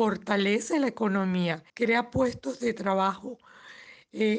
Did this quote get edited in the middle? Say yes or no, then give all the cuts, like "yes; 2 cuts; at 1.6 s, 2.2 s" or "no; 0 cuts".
yes; 1 cut; at 1.7 s